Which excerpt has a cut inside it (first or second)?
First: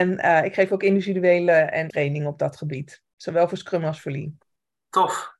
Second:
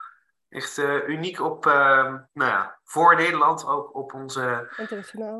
first